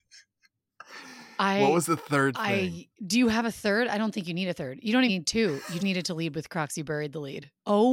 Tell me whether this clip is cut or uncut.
cut